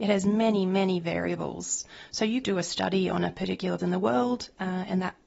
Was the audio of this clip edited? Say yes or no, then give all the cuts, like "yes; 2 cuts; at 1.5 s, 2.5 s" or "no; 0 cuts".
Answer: yes; 2 cuts; at 2.4 s, 3.8 s